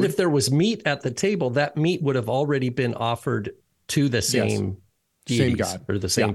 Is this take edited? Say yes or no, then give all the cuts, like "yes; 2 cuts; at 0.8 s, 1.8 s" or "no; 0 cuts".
no; 0 cuts